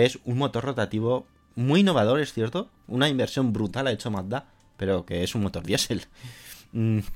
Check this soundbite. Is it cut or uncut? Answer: uncut